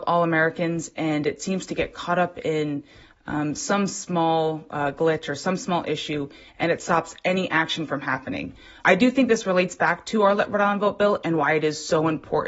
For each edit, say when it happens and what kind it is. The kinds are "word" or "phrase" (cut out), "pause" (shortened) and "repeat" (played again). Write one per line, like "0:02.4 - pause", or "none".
none